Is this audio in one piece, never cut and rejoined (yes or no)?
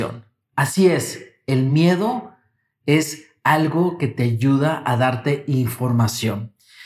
yes